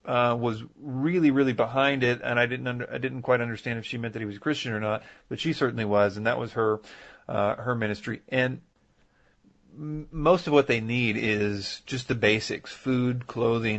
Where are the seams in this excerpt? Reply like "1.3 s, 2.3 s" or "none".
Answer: none

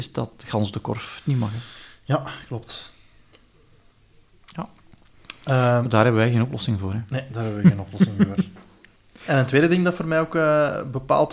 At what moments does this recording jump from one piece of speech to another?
none

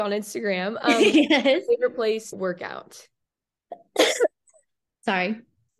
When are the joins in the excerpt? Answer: 2.3 s, 3.2 s

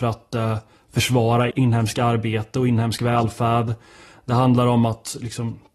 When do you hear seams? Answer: 1.5 s

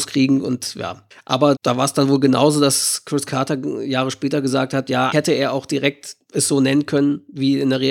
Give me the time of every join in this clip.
1.6 s, 5.1 s

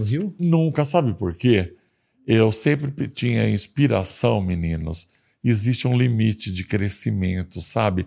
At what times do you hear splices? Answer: none

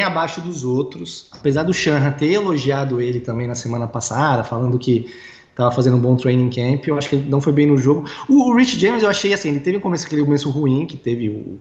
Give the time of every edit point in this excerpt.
none

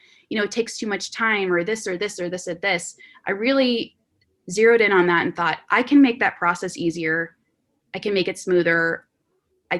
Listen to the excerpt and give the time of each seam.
none

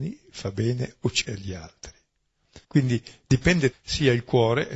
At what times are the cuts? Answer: 1.2 s, 2.6 s, 3.7 s

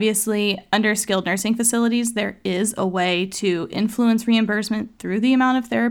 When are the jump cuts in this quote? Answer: none

